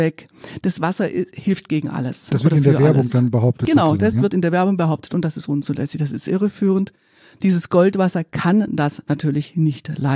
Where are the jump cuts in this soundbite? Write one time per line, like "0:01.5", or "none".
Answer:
none